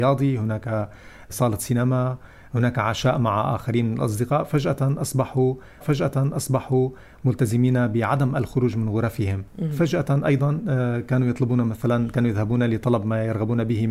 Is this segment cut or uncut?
cut